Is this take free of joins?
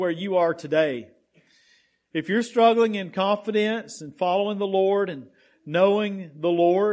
yes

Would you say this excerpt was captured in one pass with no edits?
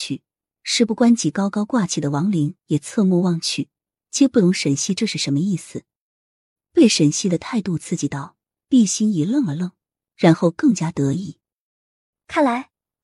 yes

